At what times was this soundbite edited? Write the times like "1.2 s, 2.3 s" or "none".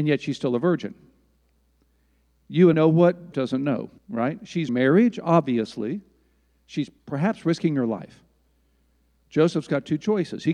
2.7 s, 3.3 s, 4.0 s, 4.7 s, 7.0 s